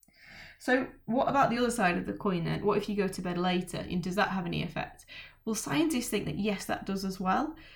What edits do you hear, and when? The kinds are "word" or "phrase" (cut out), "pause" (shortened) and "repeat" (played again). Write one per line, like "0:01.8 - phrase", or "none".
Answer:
none